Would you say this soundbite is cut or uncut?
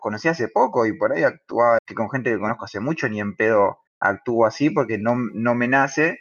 cut